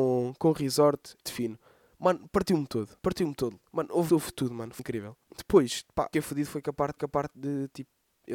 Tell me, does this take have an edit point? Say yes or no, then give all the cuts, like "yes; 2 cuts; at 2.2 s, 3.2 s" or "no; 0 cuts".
yes; 8 cuts; at 1.3 s, 3.0 s, 3.7 s, 4.1 s, 4.8 s, 5.2 s, 6.1 s, 7.0 s